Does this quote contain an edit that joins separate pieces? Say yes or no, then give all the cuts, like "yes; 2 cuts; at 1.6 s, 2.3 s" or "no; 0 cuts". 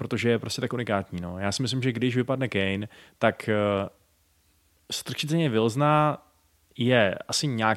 no; 0 cuts